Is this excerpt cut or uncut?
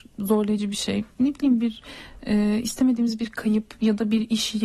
uncut